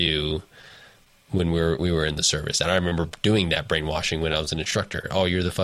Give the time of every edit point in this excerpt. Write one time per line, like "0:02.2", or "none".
none